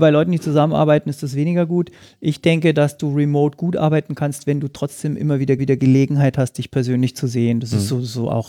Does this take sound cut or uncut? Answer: cut